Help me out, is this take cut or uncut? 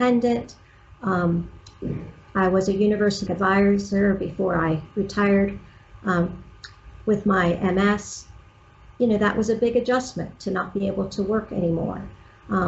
cut